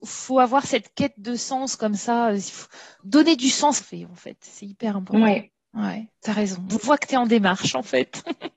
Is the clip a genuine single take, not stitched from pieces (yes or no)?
no